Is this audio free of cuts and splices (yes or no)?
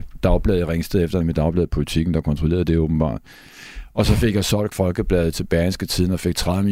no